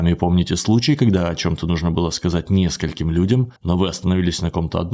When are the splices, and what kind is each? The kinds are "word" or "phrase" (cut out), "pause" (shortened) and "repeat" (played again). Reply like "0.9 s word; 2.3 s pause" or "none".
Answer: 3.6 s pause

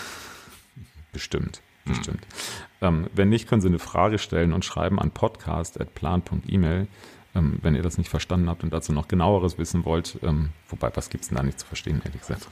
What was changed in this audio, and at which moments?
10.6 s pause

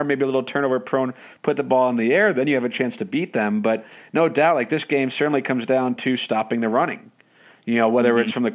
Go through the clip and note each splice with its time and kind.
none

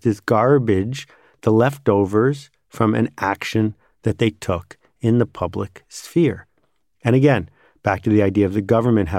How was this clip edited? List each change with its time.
none

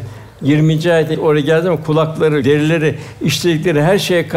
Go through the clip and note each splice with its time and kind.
1.1 s word; 2.4 s word

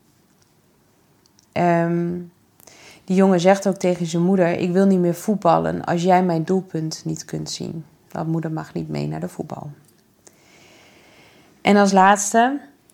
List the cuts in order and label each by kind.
none

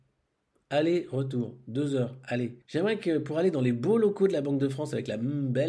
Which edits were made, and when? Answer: 2.6 s pause

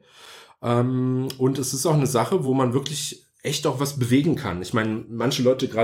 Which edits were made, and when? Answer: none

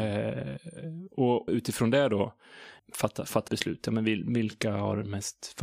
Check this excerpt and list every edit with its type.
1.5 s word; 2.8 s word; 3.5 s word

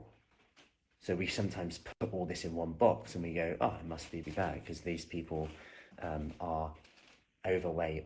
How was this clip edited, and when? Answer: 4.2 s phrase; 5.9 s pause

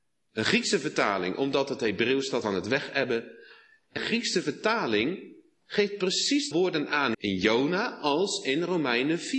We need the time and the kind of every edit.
2.4 s word; 4.0 s word; 6.5 s word; 7.1 s word

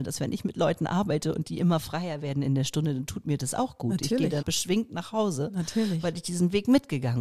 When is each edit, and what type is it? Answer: 4.4 s word

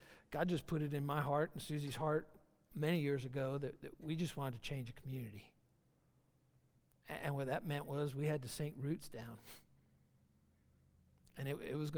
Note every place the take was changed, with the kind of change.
none

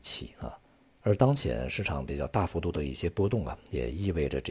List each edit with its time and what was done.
none

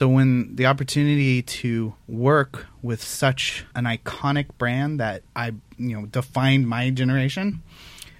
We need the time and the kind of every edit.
2.0 s pause; 3.7 s pause; 5.3 s pause

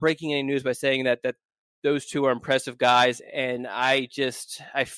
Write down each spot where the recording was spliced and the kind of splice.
none

